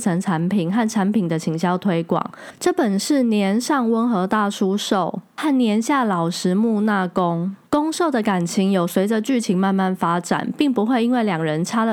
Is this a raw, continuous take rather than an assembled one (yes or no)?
no